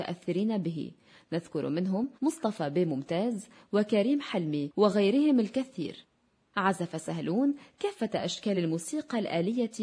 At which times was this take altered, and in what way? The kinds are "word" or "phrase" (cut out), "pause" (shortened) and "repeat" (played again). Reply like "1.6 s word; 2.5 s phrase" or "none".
none